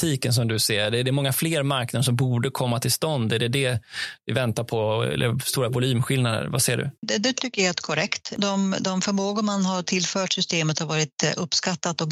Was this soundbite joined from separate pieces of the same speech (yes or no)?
yes